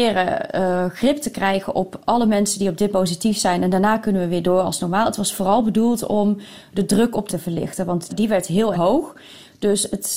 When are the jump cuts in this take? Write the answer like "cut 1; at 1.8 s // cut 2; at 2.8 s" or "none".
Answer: cut 1; at 2.9 s // cut 2; at 7.3 s // cut 3; at 8.1 s // cut 4; at 8.7 s